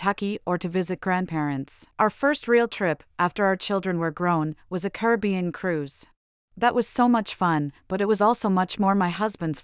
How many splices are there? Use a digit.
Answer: 2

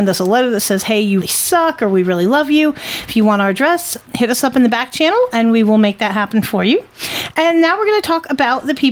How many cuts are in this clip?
2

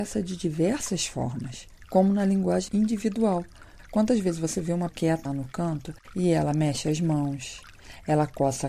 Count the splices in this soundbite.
3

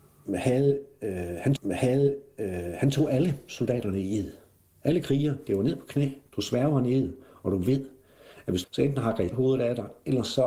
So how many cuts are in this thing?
4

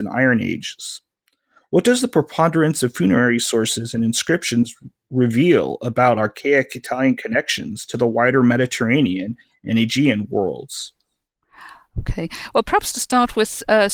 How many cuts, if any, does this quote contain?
0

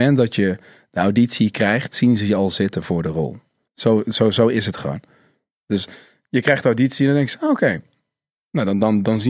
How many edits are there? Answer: 0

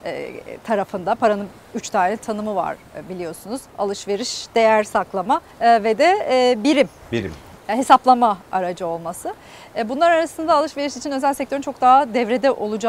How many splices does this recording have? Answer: 1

